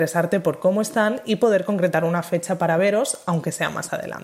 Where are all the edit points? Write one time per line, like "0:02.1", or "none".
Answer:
none